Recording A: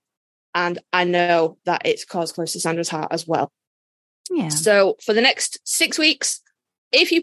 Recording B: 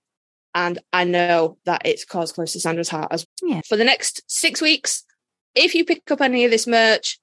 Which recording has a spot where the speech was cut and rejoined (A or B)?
B